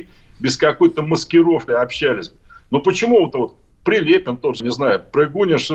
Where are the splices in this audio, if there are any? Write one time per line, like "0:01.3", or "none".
0:01.7
0:03.3
0:04.6